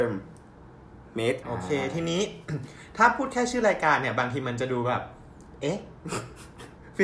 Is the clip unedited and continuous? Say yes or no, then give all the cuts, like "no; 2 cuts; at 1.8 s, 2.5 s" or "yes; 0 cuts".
no; 1 cut; at 1.4 s